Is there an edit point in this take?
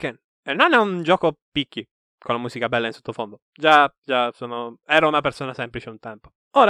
yes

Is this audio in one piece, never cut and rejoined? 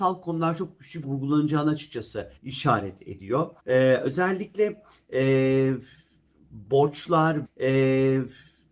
no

